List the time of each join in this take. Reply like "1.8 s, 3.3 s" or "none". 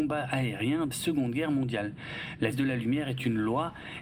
0.9 s, 2.5 s